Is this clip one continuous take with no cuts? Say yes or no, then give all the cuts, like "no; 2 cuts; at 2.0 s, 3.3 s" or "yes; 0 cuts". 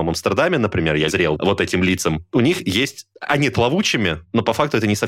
no; 2 cuts; at 1.1 s, 3.5 s